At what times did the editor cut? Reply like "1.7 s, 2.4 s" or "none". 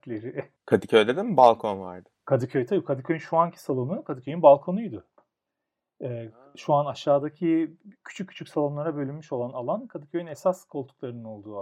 none